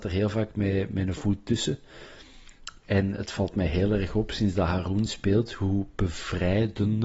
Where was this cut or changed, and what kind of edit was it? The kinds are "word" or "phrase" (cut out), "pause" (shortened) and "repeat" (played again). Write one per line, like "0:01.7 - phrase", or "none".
none